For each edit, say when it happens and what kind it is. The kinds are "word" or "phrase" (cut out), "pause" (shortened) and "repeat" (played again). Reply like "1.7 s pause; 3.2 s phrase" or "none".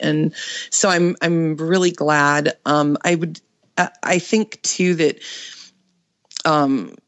none